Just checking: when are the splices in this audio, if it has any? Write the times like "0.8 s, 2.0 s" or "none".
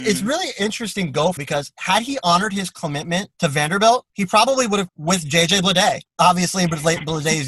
1.4 s, 3.3 s, 4.1 s, 4.9 s, 6.1 s